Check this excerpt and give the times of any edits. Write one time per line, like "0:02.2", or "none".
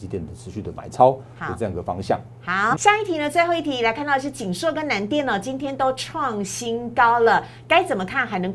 0:02.8